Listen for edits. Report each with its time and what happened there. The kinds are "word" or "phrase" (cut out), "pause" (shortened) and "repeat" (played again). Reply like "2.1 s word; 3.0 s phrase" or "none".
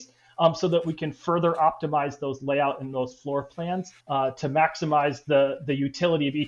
4.0 s pause